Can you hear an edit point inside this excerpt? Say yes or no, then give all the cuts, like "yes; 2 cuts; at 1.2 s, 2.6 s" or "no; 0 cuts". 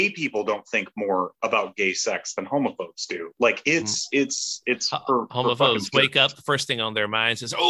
no; 0 cuts